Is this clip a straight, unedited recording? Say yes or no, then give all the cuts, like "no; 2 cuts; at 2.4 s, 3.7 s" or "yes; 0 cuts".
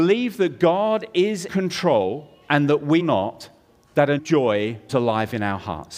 no; 4 cuts; at 1.5 s, 3.0 s, 4.2 s, 4.9 s